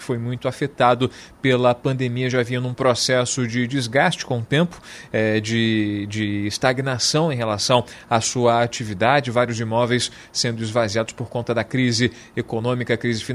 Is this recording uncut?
yes; 0 cuts

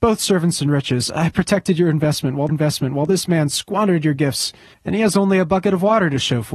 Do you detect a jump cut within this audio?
yes; 2 cuts; at 2.5 s, 4.7 s

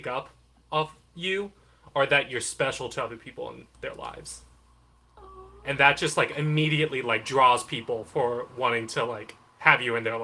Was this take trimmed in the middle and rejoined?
no; 0 cuts

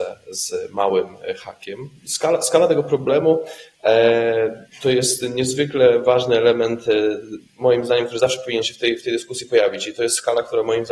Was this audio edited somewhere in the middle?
yes; 2 cuts; at 2.0 s, 7.5 s

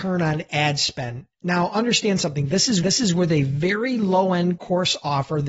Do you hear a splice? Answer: yes; 1 cut; at 2.8 s

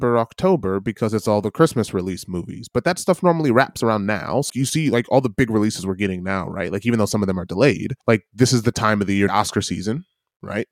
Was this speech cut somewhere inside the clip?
yes; 3 cuts; at 4.5 s, 8.0 s, 9.3 s

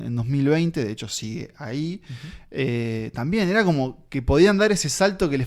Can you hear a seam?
no; 0 cuts

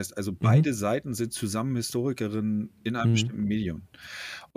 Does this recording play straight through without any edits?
yes; 0 cuts

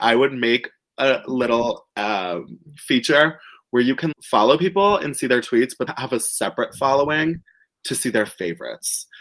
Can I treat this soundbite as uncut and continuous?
no; 2 cuts; at 4.1 s, 5.9 s

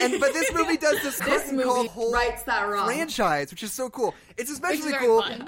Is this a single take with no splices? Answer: no; 2 cuts; at 1.2 s, 1.9 s

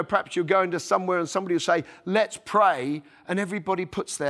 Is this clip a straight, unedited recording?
yes; 0 cuts

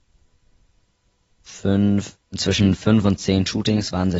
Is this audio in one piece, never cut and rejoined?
yes; 0 cuts

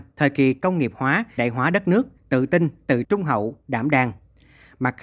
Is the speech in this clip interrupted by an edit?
yes; 3 cuts; at 1.4 s, 2.2 s, 3.0 s

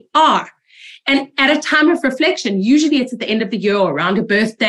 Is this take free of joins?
yes; 0 cuts

